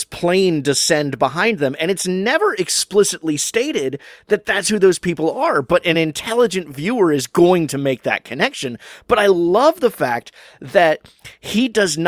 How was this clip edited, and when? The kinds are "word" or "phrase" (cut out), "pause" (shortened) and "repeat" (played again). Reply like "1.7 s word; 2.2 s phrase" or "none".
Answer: none